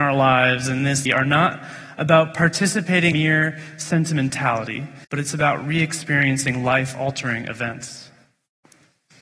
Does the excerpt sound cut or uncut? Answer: cut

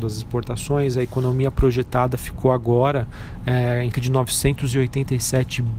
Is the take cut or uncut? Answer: cut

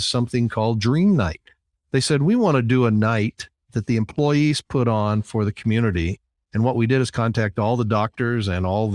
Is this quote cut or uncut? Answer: uncut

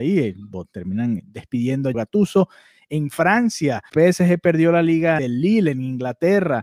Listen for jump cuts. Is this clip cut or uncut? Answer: cut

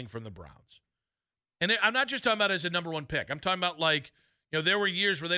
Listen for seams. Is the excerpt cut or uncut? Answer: uncut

